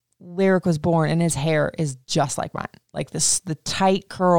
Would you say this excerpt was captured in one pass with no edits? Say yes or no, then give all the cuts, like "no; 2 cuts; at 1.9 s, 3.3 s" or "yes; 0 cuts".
yes; 0 cuts